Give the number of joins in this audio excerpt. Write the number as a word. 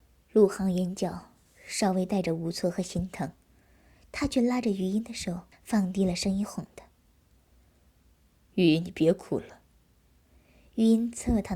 one